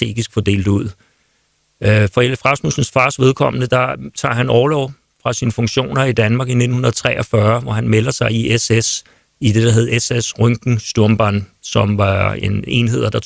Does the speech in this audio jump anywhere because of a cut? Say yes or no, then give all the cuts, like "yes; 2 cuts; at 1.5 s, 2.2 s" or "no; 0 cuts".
no; 0 cuts